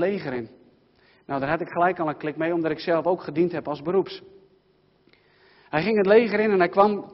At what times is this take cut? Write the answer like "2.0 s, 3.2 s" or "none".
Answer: none